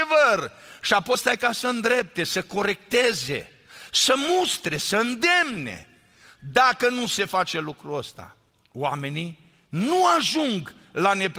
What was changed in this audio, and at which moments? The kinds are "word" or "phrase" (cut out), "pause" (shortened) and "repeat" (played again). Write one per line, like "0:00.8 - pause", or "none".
0:01.1 - word